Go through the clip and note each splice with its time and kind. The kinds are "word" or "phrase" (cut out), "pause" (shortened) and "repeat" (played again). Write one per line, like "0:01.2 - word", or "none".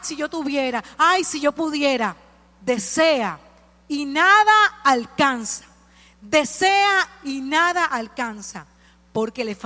none